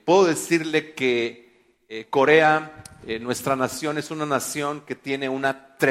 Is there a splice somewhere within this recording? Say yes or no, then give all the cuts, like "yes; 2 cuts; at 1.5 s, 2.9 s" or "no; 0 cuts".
no; 0 cuts